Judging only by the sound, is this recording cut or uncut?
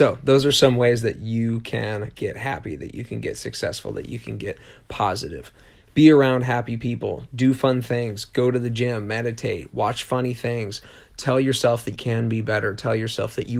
cut